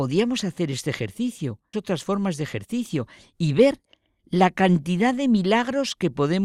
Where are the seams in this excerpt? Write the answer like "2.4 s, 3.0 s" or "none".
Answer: 1.7 s